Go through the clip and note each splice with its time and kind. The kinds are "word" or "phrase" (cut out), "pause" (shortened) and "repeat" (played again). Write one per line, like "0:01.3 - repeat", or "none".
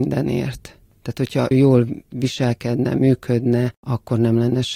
0:01.5 - word